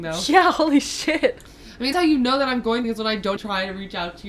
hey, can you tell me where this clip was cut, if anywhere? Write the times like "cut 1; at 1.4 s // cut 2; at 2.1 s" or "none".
cut 1; at 1.9 s // cut 2; at 2.8 s // cut 3; at 3.4 s

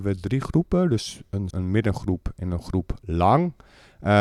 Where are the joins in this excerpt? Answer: cut 1; at 1.5 s

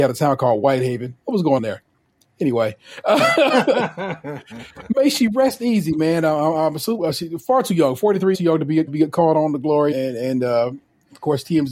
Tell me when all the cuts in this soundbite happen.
cut 1; at 1.6 s // cut 2; at 8.3 s // cut 3; at 8.9 s // cut 4; at 9.9 s

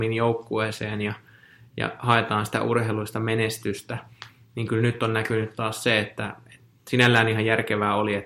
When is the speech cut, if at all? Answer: none

